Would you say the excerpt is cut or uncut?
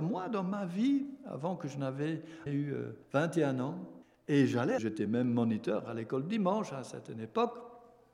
cut